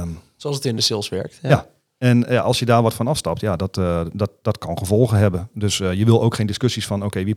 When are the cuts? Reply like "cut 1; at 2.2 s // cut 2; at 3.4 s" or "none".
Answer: none